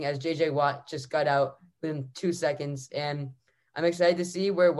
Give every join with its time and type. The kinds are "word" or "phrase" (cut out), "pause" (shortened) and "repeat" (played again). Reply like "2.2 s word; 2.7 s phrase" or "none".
none